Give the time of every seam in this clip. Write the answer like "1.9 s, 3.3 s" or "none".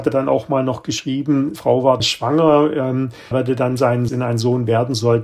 1.6 s, 2.0 s, 3.3 s, 4.1 s